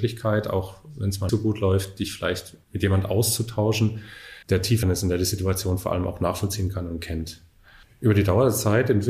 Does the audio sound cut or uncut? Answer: cut